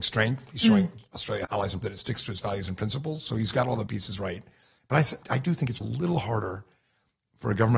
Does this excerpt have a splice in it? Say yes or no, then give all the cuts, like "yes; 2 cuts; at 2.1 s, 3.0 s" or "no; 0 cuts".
yes; 5 cuts; at 1.4 s, 1.8 s, 3.9 s, 5.2 s, 5.8 s